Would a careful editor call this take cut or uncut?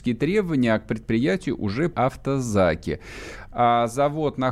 cut